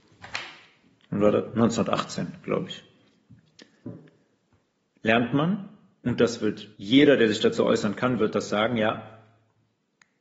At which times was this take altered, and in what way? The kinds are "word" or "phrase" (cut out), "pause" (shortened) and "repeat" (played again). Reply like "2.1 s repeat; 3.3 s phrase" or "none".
6.7 s pause